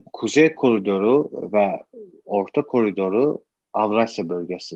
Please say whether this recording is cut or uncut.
uncut